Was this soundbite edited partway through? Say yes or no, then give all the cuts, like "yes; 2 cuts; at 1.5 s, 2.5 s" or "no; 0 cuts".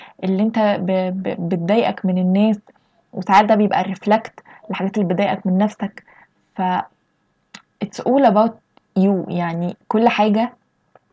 no; 0 cuts